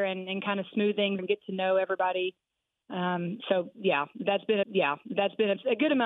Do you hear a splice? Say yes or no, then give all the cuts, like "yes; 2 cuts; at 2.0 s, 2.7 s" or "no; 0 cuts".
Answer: yes; 2 cuts; at 1.2 s, 4.6 s